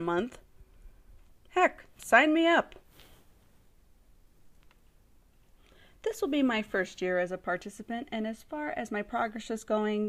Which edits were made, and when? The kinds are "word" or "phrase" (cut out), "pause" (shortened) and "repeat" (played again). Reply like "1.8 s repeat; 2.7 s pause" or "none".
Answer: 1.3 s word